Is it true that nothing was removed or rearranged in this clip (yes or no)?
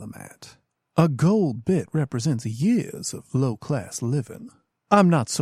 yes